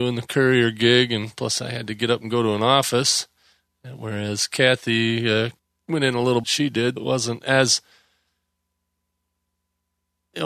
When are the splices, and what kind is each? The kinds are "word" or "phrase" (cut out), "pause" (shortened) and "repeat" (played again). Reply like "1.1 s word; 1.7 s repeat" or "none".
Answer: 5.6 s pause; 6.4 s phrase; 7.0 s word